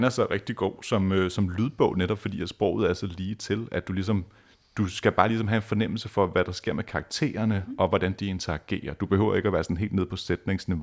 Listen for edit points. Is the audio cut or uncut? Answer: uncut